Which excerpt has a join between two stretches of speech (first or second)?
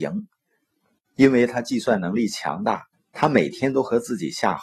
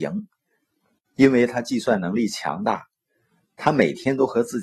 first